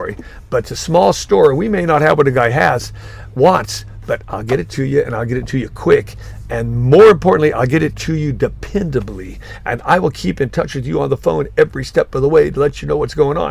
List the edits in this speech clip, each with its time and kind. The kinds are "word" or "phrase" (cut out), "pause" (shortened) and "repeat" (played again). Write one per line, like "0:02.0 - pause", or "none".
none